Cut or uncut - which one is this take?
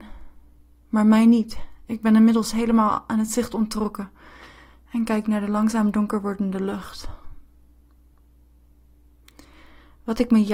uncut